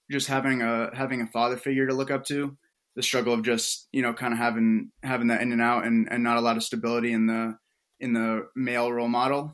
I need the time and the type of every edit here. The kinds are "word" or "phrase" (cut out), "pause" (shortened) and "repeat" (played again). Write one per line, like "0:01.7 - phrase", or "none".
none